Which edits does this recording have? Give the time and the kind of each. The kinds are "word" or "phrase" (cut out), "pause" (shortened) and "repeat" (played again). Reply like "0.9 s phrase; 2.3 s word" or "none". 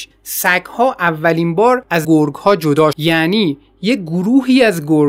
2.0 s word; 2.9 s word

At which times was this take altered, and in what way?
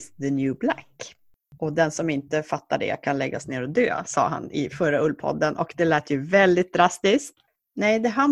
none

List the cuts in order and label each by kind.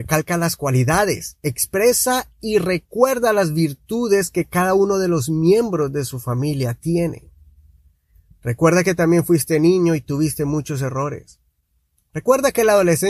none

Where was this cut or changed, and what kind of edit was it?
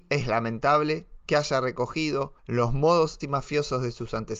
2.4 s pause; 3.2 s word

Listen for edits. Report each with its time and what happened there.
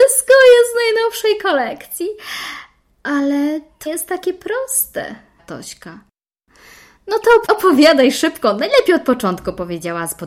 3.9 s word; 5.4 s word; 7.4 s word

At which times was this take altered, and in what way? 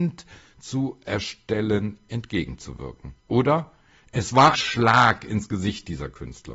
3.2 s pause; 4.5 s word

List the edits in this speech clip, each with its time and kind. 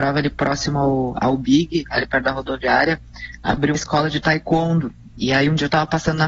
3.7 s word

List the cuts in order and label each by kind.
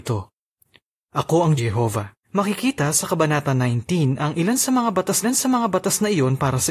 1.6 s phrase; 2.2 s pause; 5.2 s repeat

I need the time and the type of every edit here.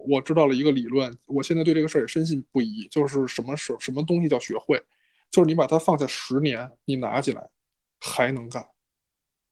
none

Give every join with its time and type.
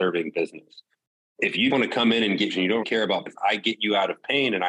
0.9 s pause; 1.7 s word; 2.5 s word; 2.8 s word; 3.3 s word

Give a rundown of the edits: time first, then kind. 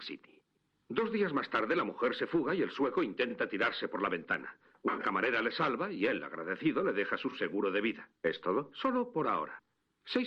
none

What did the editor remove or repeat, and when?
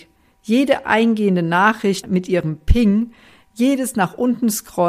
2.0 s word

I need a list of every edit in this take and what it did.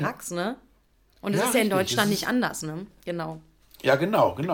none

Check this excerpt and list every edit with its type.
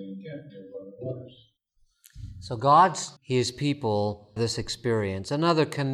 3.2 s word; 4.4 s word

